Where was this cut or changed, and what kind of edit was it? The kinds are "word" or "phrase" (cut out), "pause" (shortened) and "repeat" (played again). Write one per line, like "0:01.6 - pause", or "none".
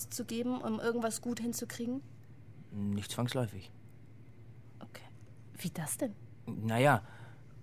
none